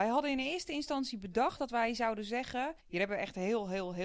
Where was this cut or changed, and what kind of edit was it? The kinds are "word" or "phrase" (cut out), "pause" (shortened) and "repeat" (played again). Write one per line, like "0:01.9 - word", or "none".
0:02.8 - pause